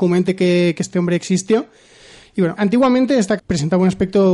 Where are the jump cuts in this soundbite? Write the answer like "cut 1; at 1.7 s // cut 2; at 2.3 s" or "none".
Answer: cut 1; at 2.6 s // cut 2; at 3.4 s